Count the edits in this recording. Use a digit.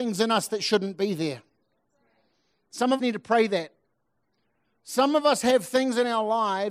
1